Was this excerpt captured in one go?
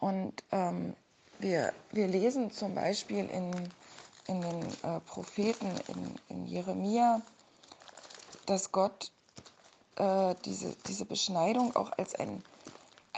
yes; 0 cuts

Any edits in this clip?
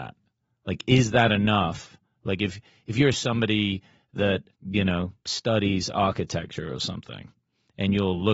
yes; 1 cut; at 4.5 s

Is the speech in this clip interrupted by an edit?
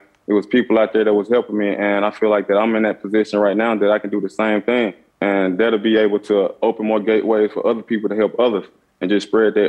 yes; 1 cut; at 5.1 s

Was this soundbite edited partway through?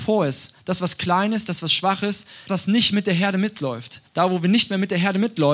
yes; 2 cuts; at 2.5 s, 4.1 s

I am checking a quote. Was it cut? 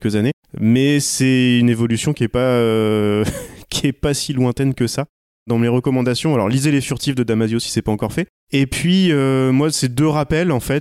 no; 0 cuts

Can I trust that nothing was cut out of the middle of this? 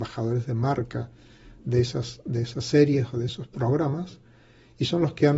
yes; 0 cuts

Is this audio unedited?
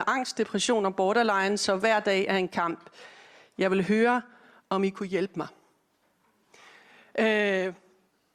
yes; 0 cuts

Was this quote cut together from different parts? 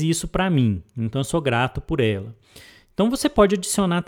no; 0 cuts

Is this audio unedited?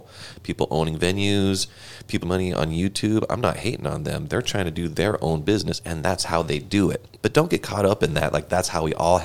no; 1 cut; at 2.2 s

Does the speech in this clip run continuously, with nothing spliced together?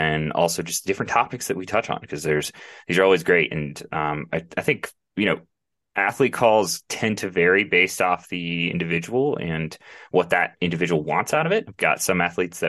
yes; 0 cuts

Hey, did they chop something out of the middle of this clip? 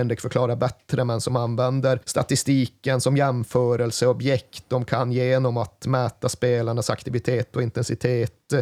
yes; 1 cut; at 2.0 s

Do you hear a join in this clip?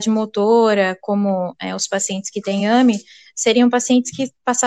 no; 0 cuts

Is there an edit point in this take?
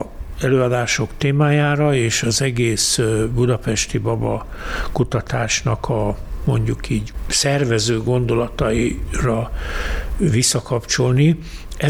no; 0 cuts

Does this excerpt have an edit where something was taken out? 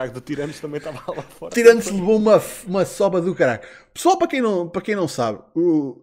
no; 0 cuts

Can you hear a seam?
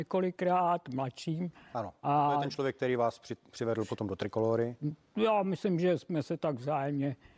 no; 0 cuts

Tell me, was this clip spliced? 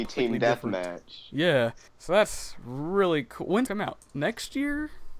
yes; 2 cuts; at 1.9 s, 3.7 s

